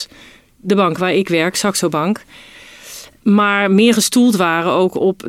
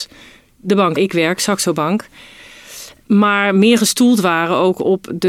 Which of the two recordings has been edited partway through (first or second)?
second